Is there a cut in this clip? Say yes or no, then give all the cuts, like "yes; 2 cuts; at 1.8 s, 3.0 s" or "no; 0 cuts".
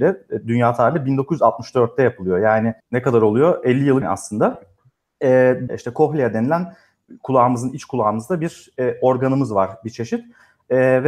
yes; 3 cuts; at 2.8 s, 4.0 s, 5.7 s